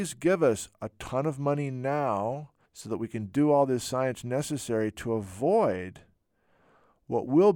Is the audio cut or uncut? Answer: cut